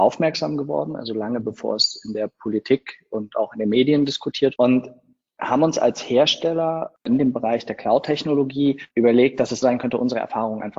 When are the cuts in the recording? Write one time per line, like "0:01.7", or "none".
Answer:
0:04.6
0:08.9
0:09.6